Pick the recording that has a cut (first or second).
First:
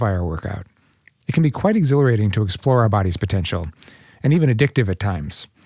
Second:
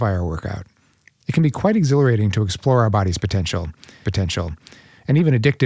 second